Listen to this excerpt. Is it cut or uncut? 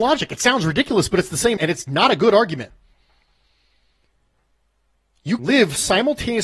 cut